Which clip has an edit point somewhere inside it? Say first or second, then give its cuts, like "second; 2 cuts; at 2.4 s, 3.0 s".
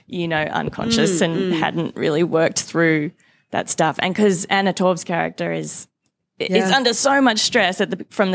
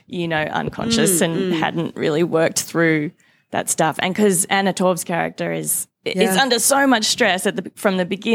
second; 1 cut; at 5.9 s